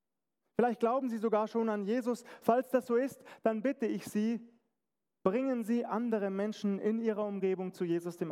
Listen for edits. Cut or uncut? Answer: uncut